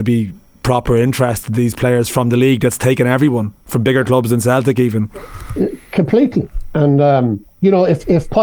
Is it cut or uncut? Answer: cut